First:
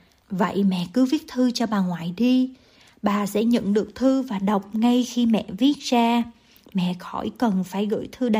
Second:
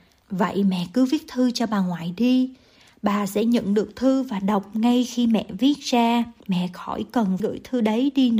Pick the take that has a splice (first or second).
second